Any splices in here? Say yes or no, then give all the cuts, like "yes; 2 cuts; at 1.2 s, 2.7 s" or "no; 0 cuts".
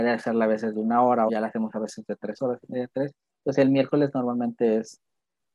yes; 2 cuts; at 1.3 s, 2.4 s